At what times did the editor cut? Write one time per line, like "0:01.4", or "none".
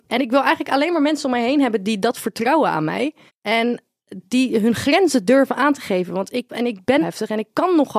0:03.3
0:06.5
0:07.0